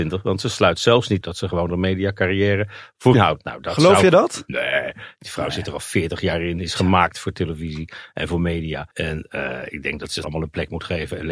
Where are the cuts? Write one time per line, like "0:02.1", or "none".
0:01.2
0:03.1
0:08.9
0:10.2